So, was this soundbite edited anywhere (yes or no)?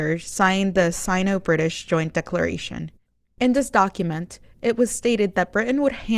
no